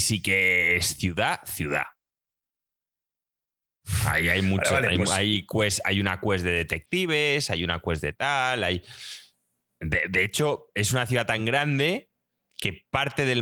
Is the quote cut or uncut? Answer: uncut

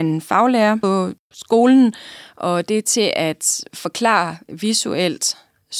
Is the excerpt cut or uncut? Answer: uncut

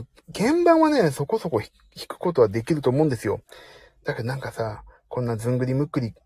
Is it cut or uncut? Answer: uncut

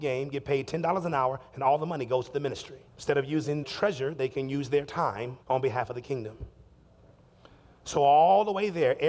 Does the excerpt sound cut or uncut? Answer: cut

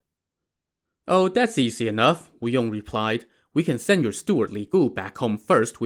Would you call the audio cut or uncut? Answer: uncut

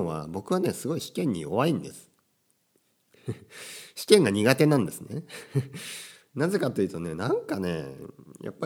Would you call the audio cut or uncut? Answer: uncut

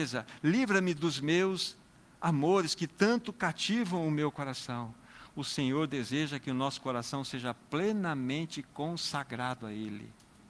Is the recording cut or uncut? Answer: uncut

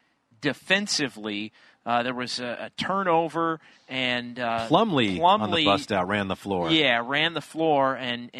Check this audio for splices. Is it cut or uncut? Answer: uncut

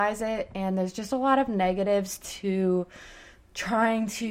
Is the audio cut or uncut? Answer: uncut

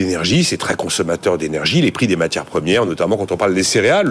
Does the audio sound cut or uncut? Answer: uncut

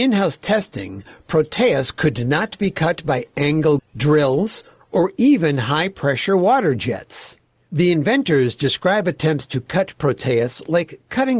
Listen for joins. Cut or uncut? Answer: cut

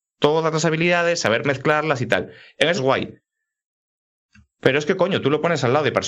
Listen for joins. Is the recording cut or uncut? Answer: cut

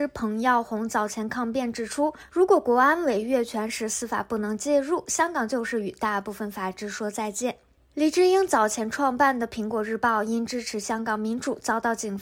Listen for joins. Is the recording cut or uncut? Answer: uncut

